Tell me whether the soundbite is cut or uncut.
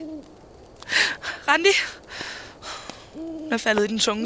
uncut